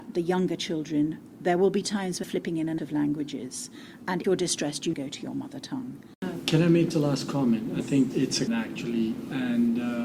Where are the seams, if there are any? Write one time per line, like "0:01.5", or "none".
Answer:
0:02.2
0:02.8
0:04.2
0:04.9
0:06.9
0:07.8
0:08.1
0:08.5

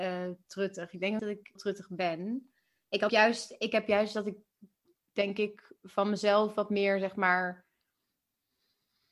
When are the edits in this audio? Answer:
0:01.2
0:01.6
0:03.1

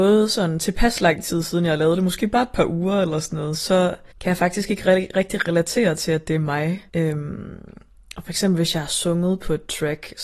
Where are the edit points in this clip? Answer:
0:04.1
0:06.9

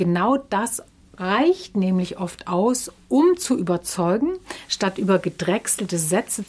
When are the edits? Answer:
none

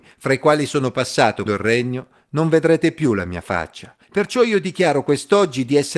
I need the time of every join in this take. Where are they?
0:01.5
0:04.0

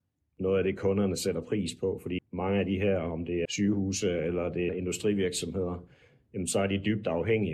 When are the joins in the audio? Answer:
0:02.2
0:03.4
0:04.7

